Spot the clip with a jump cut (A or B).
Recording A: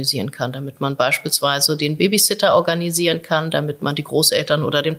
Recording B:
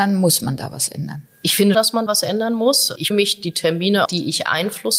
B